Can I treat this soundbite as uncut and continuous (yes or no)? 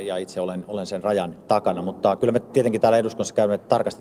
yes